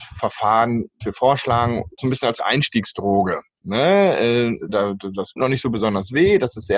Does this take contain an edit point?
yes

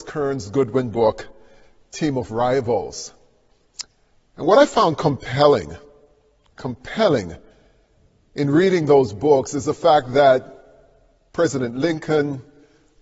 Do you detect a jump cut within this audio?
no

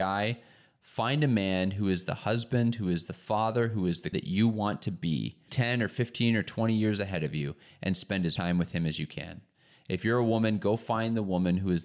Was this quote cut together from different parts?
yes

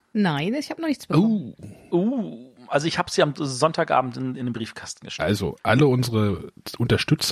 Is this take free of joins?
yes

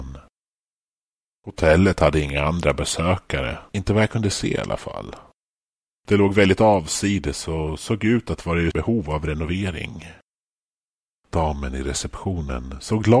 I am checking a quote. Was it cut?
yes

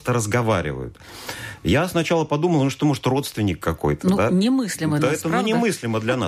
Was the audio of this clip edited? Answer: yes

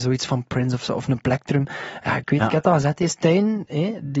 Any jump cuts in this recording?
no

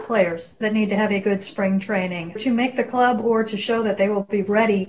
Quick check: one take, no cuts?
no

